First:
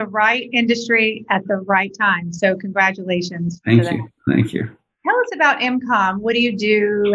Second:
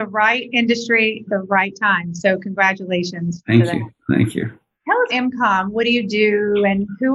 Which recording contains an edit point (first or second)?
second